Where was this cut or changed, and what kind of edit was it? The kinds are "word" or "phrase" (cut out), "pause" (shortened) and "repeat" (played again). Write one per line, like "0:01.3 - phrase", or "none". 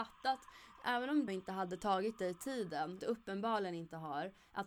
0:01.3 - word
0:03.0 - word